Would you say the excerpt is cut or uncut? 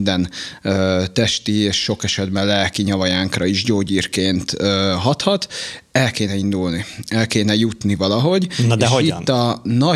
uncut